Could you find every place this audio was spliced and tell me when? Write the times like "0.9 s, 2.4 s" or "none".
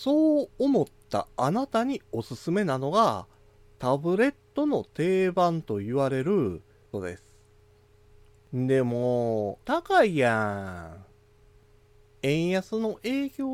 6.9 s, 9.6 s